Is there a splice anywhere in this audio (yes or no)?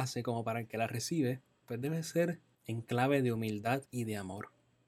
yes